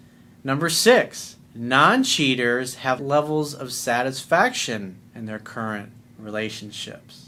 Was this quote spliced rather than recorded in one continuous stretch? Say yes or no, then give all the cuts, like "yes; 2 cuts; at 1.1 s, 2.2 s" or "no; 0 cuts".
yes; 3 cuts; at 1.4 s, 3.0 s, 5.1 s